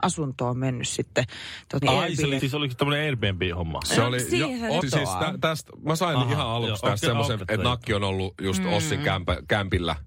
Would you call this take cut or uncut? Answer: cut